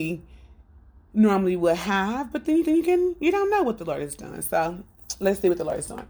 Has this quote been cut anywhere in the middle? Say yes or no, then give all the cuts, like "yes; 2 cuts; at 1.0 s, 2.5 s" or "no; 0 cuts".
yes; 1 cut; at 2.6 s